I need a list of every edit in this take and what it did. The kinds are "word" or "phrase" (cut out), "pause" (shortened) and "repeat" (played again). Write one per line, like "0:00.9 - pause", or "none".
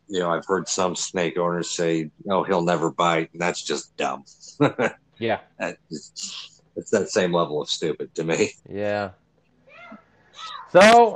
0:02.2 - pause
0:05.5 - pause
0:08.6 - pause